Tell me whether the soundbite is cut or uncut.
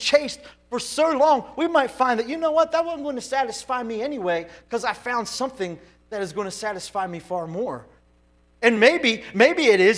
uncut